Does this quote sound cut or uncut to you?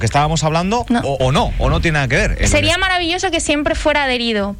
cut